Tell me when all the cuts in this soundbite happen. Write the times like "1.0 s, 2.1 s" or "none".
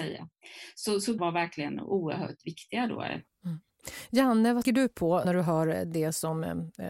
1.2 s, 4.6 s, 5.2 s